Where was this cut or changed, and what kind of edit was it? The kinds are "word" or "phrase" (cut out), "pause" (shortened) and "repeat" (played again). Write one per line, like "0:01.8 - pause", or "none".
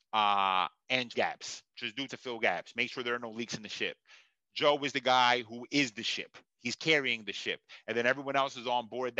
0:01.1 - word
0:02.1 - word